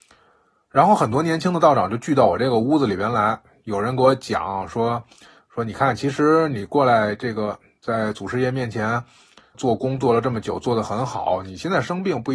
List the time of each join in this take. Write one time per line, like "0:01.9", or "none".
0:09.5

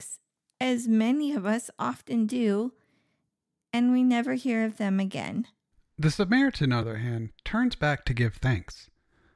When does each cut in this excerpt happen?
0:06.8

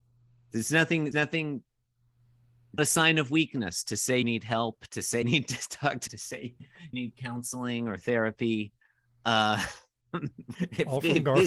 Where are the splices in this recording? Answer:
0:01.1
0:02.8
0:04.2
0:05.2
0:06.1
0:06.9
0:10.5

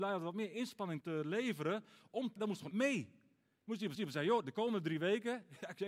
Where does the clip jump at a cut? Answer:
0:01.0
0:02.4
0:02.7
0:03.9

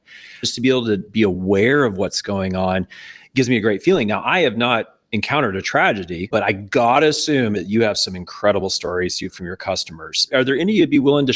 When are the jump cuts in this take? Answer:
0:09.3

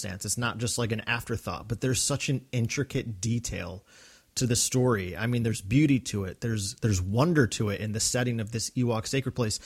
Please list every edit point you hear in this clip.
none

